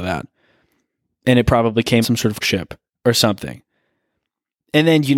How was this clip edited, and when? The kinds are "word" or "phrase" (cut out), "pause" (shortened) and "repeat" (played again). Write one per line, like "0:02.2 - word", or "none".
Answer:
0:02.0 - word
0:02.4 - word